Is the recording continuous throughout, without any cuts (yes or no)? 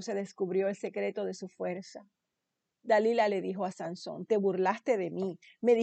yes